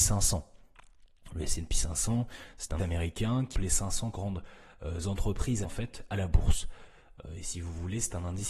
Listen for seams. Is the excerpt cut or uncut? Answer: cut